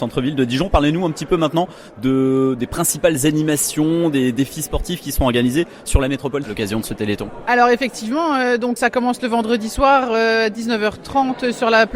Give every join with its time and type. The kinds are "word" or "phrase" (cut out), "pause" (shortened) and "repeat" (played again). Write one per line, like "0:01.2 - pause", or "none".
0:06.4 - word
0:08.8 - word